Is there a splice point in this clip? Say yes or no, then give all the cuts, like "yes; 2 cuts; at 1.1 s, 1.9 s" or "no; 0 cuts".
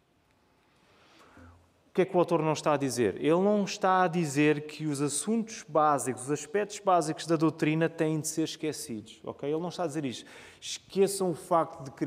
no; 0 cuts